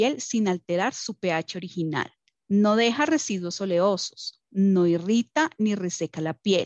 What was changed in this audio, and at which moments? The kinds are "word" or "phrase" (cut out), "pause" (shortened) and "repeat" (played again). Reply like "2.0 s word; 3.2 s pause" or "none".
2.4 s pause